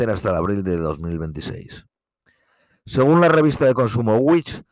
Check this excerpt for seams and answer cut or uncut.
uncut